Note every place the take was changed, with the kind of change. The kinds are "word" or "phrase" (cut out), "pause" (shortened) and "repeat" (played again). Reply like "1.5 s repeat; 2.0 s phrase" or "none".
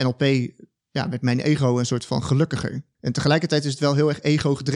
2.9 s pause